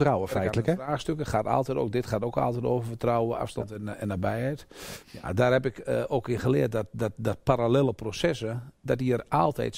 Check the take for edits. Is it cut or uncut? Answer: cut